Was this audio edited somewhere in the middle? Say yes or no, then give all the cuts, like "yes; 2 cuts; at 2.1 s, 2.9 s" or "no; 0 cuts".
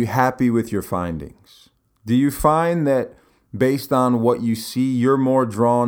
no; 0 cuts